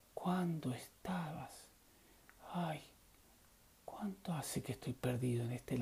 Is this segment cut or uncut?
uncut